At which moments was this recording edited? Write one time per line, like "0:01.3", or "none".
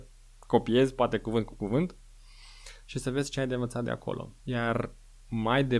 0:04.4